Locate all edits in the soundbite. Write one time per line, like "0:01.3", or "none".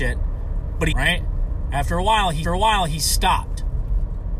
0:00.9
0:02.4